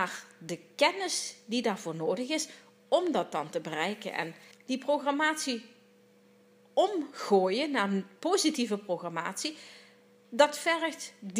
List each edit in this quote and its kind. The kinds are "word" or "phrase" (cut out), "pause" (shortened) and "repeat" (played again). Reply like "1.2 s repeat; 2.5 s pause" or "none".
4.5 s phrase